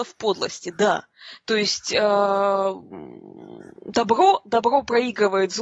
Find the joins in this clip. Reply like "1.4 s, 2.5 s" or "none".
3.8 s